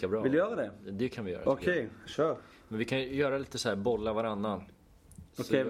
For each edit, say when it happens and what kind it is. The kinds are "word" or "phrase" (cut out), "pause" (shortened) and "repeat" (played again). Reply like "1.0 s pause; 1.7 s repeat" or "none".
none